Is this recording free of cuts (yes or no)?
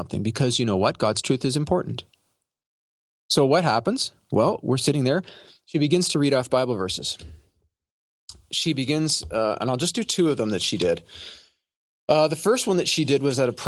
yes